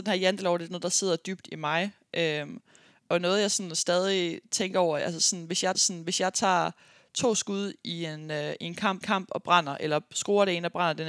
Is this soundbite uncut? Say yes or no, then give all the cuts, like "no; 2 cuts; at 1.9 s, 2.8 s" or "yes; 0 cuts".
no; 2 cuts; at 5.7 s, 9.0 s